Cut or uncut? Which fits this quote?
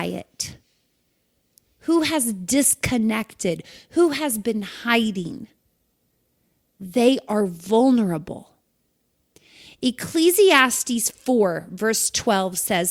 uncut